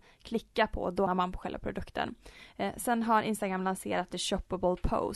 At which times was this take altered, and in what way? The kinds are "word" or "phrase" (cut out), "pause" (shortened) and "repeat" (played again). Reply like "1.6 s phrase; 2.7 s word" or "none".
1.1 s word; 4.1 s phrase